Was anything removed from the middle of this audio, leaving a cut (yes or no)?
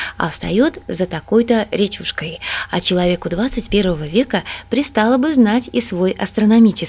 no